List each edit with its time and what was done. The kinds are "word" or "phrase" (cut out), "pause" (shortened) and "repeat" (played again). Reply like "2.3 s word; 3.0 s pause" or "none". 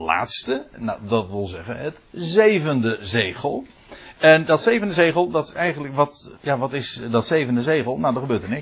6.4 s pause